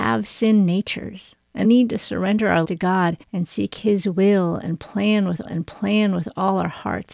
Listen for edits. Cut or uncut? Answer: cut